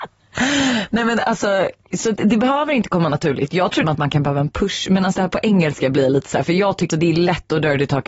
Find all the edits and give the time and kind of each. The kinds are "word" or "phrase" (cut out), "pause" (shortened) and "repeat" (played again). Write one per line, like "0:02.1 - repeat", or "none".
0:01.8 - word
0:03.8 - word
0:05.1 - word
0:06.9 - word